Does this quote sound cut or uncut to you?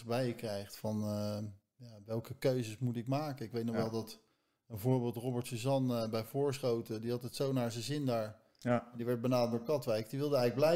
uncut